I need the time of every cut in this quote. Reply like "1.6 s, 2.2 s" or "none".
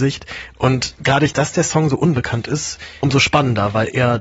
1.3 s, 3.0 s